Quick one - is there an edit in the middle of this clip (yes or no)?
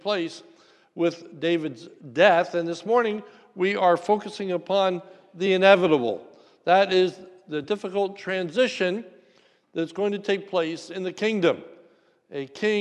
no